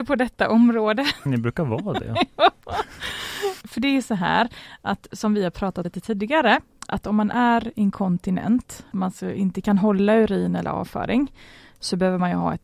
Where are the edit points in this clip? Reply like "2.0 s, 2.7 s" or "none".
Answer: 1.3 s, 3.6 s, 5.8 s, 8.9 s